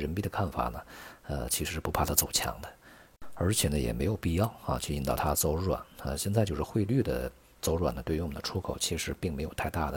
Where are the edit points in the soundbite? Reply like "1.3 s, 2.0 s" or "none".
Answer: none